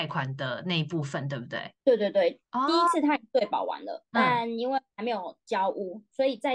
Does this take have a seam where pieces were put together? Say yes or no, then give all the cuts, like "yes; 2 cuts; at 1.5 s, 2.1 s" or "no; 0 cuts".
no; 0 cuts